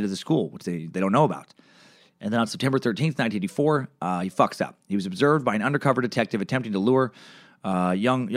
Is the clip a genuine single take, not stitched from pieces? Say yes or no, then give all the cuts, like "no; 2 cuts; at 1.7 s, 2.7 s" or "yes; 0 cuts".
yes; 0 cuts